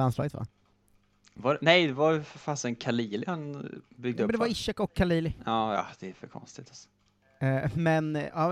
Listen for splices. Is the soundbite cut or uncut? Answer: uncut